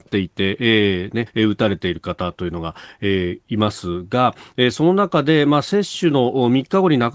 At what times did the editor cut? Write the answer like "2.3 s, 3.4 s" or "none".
1.3 s

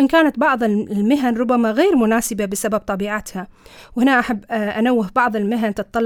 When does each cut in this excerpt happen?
none

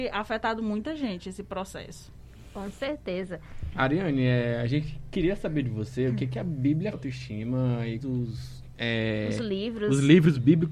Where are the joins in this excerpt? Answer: 6.9 s, 8.0 s

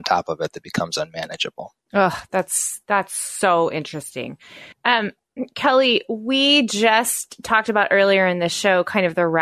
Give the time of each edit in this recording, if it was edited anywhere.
1.8 s, 4.7 s

